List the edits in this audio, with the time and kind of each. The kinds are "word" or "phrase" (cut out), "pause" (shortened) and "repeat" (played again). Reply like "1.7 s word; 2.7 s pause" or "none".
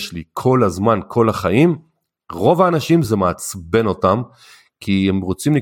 none